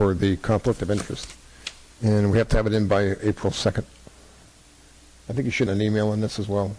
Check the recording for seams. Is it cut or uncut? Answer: cut